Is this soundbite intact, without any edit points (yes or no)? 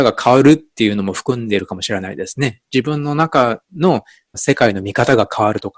yes